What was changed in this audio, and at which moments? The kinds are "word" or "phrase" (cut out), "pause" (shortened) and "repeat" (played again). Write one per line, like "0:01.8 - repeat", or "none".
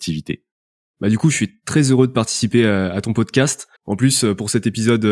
0:03.8 - pause